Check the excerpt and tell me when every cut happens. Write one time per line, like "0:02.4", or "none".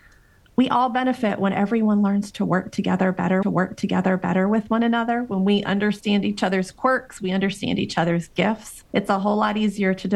0:03.4
0:08.9

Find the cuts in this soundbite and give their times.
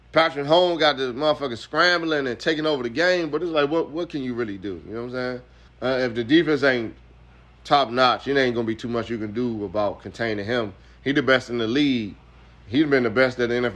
0:05.7

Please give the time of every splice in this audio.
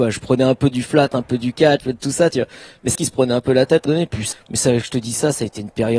0:01.8
0:02.9
0:03.9
0:04.3

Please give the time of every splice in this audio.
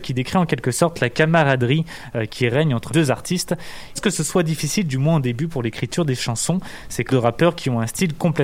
0:02.9
0:04.0
0:07.1

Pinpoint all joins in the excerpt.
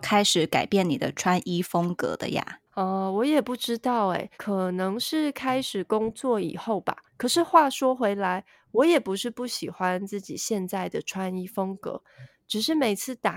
0:02.7
0:04.3
0:07.1

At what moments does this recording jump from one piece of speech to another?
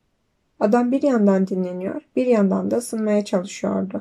none

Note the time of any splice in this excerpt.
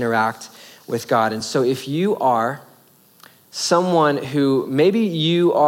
none

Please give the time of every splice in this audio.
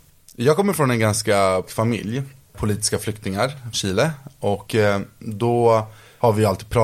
0:01.7
0:03.7

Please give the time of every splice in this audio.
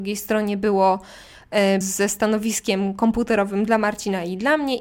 0:01.8

